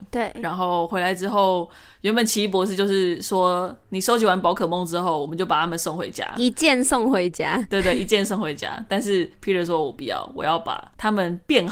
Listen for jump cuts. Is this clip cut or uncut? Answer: uncut